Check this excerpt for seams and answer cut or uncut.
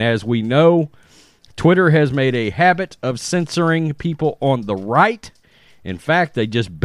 uncut